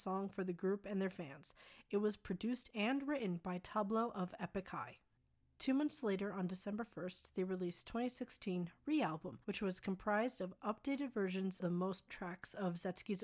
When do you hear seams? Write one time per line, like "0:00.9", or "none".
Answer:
0:09.4
0:11.6
0:12.1